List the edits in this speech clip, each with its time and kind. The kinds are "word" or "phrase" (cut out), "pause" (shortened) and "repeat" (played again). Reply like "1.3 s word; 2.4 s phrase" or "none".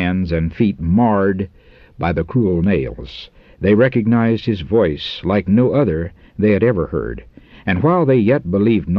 none